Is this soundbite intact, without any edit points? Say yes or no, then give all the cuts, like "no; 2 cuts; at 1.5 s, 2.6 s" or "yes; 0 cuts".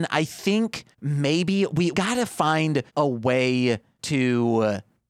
no; 3 cuts; at 0.9 s, 1.9 s, 2.9 s